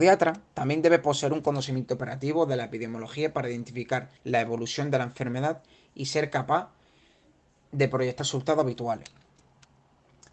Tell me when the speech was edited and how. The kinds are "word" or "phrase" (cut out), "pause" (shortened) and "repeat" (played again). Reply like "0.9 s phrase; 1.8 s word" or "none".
4.2 s pause; 8.2 s word